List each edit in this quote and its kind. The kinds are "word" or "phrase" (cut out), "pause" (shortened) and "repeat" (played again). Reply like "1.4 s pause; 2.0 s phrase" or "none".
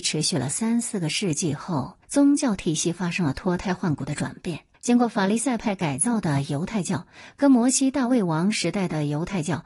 2.0 s pause; 4.7 s pause